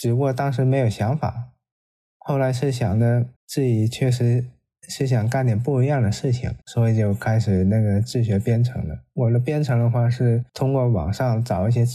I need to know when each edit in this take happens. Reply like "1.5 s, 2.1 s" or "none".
3.4 s, 6.6 s, 10.5 s